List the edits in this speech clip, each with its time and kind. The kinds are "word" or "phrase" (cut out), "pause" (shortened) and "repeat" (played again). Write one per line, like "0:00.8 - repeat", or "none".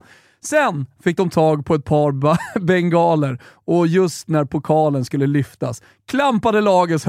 none